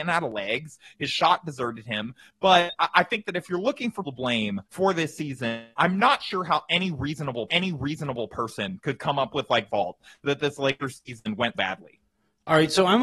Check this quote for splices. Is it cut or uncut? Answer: cut